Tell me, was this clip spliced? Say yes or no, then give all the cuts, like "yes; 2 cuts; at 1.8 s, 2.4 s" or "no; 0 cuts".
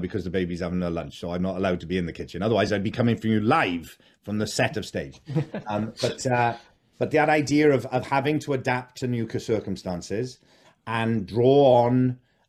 no; 0 cuts